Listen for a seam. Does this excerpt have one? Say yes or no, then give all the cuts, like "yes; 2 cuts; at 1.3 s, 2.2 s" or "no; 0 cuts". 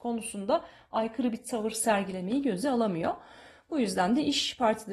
no; 0 cuts